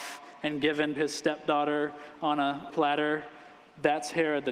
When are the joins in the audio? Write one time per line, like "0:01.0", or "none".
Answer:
0:01.0
0:02.7